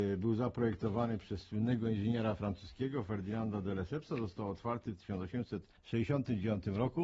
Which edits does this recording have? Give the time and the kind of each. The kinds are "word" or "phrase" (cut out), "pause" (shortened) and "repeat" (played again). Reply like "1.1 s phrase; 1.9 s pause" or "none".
none